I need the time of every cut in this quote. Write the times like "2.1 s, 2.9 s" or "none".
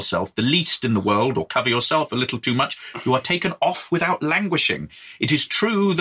none